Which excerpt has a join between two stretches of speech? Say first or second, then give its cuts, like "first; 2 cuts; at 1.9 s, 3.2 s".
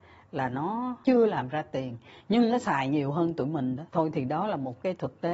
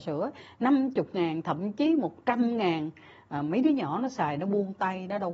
first; 1 cut; at 3.9 s